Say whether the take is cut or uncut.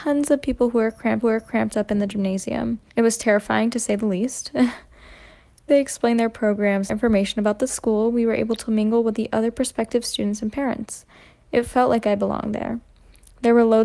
cut